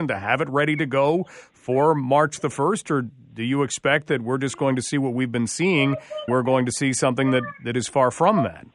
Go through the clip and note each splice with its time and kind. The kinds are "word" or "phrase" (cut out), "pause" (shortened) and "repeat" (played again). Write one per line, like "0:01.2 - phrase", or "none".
0:06.3 - word